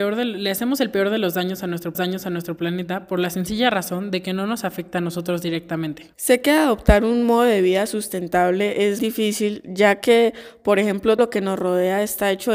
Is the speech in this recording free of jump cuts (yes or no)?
no